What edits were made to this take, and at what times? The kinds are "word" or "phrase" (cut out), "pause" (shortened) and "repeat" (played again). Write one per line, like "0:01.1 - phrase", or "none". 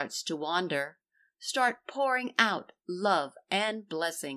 none

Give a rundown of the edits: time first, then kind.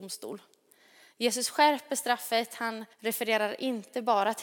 0:02.9 - pause

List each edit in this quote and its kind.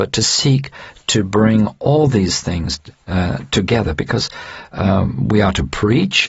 none

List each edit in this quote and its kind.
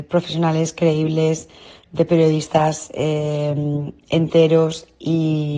none

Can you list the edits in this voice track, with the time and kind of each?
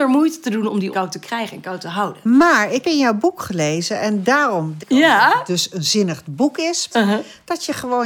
0:00.9 - word
0:02.8 - word
0:04.8 - word
0:06.9 - word

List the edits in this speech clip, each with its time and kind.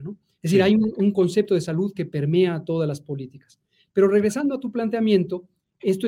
none

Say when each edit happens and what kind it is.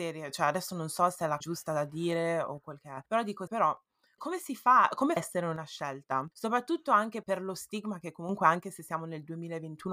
0:01.4 - word
0:03.1 - pause
0:03.5 - word
0:04.2 - word
0:05.2 - phrase
0:06.3 - pause
0:07.2 - word

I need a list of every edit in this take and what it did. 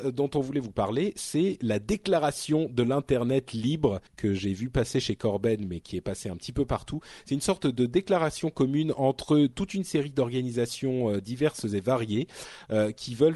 0:04.1 - pause

